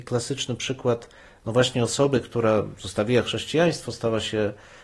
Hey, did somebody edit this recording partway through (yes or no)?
no